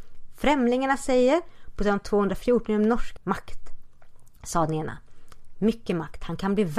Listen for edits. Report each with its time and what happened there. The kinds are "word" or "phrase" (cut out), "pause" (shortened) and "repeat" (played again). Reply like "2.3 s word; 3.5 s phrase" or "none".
3.2 s word